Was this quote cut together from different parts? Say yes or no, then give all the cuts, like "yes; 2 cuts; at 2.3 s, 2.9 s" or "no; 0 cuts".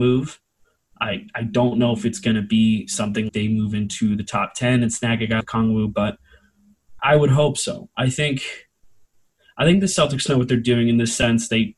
yes; 3 cuts; at 3.3 s, 5.4 s, 7.0 s